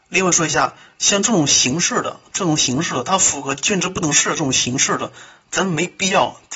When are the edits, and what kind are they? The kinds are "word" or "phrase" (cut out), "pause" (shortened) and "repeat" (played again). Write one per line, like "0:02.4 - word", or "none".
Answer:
none